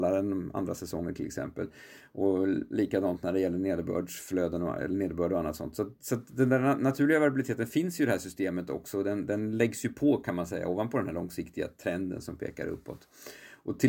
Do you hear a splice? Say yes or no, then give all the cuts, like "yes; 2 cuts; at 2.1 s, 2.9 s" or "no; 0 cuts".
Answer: no; 0 cuts